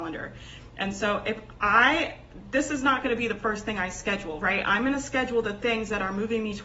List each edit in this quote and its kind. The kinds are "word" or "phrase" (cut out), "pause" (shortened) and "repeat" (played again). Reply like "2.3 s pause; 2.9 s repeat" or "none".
none